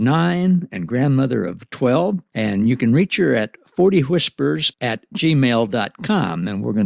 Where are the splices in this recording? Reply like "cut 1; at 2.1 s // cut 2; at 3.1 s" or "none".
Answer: none